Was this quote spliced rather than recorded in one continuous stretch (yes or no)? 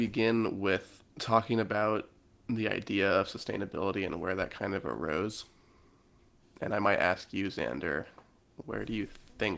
yes